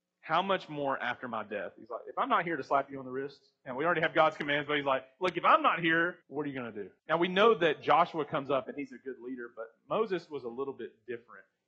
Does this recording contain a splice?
yes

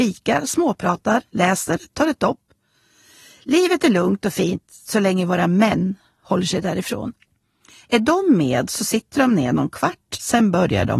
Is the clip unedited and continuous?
yes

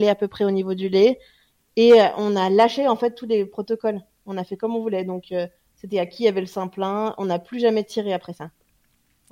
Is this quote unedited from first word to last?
yes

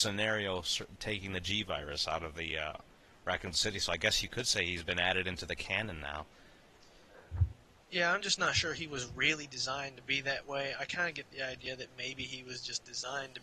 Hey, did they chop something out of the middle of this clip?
no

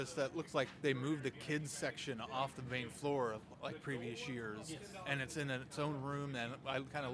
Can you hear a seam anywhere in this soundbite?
no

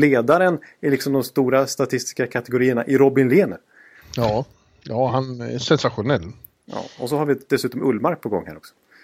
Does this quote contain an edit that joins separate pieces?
no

